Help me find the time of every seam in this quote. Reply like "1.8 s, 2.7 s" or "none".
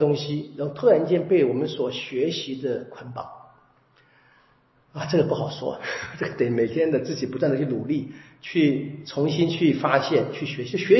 none